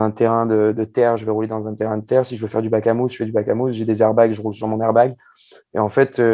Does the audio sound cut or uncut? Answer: uncut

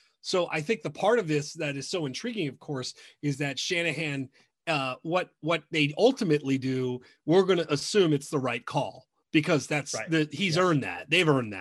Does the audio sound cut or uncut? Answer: uncut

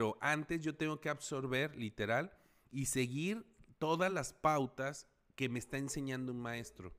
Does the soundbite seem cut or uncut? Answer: uncut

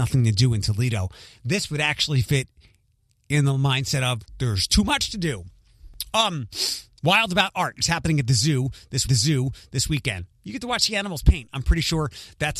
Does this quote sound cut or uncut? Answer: cut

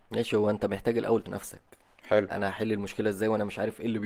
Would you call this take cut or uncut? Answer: cut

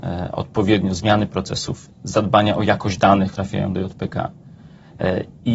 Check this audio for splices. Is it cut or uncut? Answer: cut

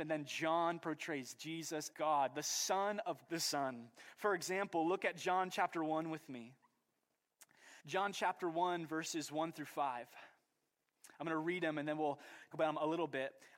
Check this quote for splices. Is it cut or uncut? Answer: cut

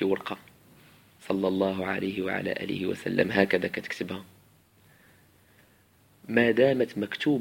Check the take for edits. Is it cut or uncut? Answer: uncut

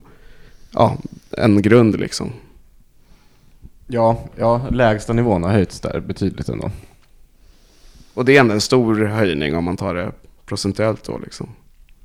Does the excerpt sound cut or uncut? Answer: uncut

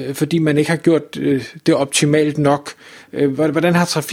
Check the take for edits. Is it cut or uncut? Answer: uncut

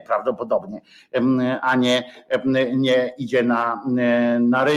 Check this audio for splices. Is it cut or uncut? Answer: uncut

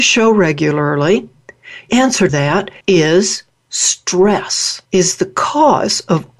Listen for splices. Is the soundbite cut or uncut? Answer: cut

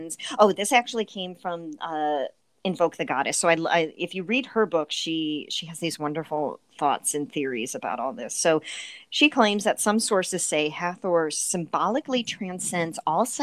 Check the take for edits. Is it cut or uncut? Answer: uncut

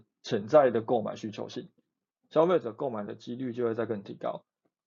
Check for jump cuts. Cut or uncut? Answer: uncut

